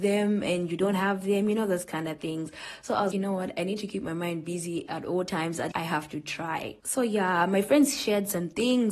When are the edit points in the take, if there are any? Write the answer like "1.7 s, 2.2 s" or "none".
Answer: 3.1 s, 5.7 s, 6.8 s